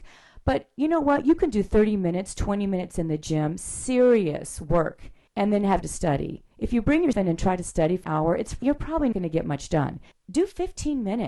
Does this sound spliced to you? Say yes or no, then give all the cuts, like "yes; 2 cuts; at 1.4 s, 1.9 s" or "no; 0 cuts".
yes; 8 cuts; at 5.3 s, 5.8 s, 6.5 s, 7.1 s, 8.0 s, 8.6 s, 9.1 s, 10.1 s